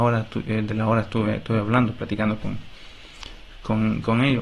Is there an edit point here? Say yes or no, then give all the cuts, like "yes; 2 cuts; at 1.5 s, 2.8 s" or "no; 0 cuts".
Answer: no; 0 cuts